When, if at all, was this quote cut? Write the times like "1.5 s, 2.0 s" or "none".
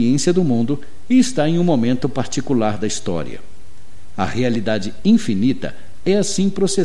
none